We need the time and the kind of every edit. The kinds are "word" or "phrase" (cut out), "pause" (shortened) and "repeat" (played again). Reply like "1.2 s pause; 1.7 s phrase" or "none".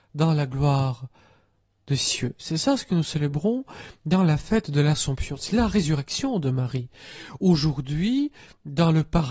none